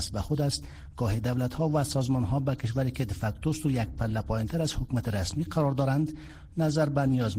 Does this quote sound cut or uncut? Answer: uncut